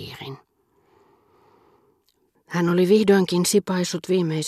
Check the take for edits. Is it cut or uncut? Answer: uncut